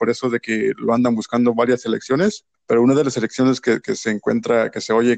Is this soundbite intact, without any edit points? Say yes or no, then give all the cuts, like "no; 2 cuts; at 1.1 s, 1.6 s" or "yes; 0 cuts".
no; 1 cut; at 2.5 s